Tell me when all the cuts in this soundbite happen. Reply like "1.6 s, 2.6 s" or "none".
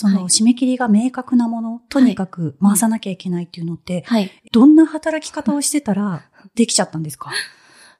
4.4 s